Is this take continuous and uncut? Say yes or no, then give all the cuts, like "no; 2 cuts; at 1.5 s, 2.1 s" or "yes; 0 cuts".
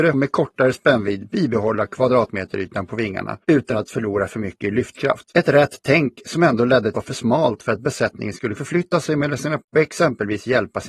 no; 5 cuts; at 3.4 s, 5.3 s, 6.9 s, 8.6 s, 9.6 s